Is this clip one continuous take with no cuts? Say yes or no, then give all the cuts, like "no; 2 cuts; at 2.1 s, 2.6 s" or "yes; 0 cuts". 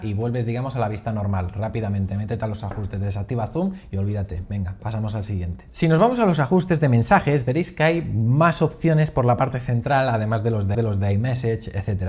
no; 1 cut; at 10.7 s